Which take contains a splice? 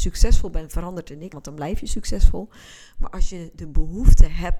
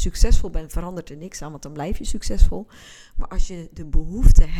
first; 1 cut; at 1.3 s

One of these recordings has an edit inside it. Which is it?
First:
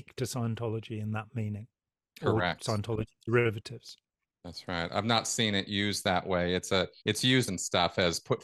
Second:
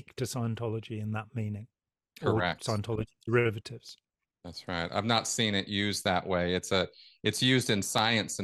first; 2 cuts; at 7.0 s, 7.5 s

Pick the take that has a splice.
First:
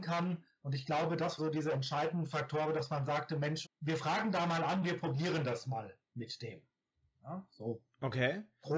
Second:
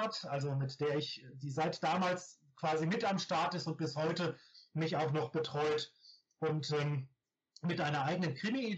first; 2 cuts; at 1.4 s, 3.6 s

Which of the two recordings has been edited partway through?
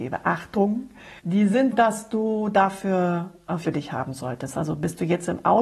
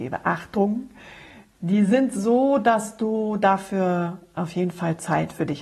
first; 3 cuts; at 1.2 s, 1.7 s, 3.7 s

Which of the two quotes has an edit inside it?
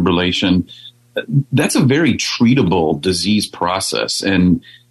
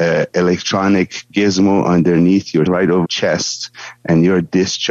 second; 2 cuts; at 2.7 s, 3.0 s

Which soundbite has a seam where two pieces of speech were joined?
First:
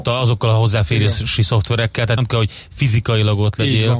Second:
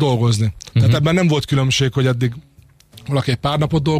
first; 1 cut; at 2.2 s

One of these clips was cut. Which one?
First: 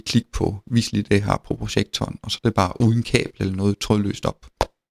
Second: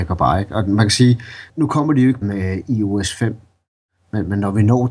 second; 2 cuts; at 1.5 s, 2.2 s

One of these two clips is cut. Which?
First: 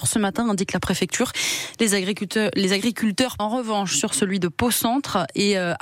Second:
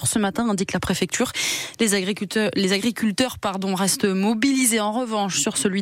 first; 1 cut; at 3.4 s

